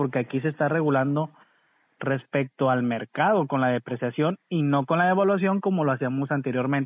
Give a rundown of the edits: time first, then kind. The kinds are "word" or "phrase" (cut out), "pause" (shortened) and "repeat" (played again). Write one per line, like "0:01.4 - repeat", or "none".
none